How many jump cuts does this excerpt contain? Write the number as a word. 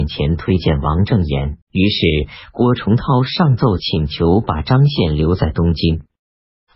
one